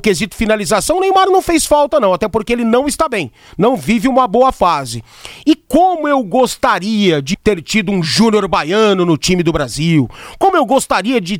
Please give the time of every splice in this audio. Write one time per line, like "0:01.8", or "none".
0:07.3